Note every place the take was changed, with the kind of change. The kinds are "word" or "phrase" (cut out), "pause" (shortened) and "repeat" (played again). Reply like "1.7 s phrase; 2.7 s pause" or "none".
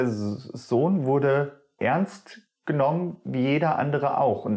1.8 s word